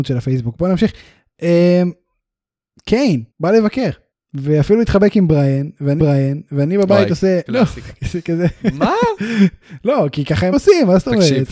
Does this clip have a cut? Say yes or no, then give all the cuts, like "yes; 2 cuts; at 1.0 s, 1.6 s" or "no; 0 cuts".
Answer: yes; 5 cuts; at 3.3 s, 4.1 s, 6.0 s, 7.5 s, 10.5 s